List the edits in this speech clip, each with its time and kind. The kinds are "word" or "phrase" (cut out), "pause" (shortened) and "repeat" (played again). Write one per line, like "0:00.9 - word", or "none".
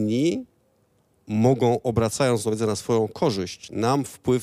none